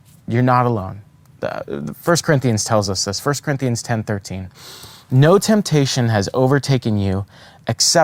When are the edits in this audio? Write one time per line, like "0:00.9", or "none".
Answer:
none